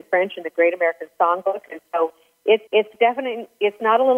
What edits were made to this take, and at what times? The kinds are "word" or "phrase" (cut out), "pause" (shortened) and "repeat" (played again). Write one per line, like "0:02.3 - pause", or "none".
0:02.7 - pause